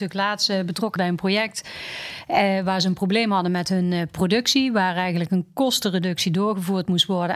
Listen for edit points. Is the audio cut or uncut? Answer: cut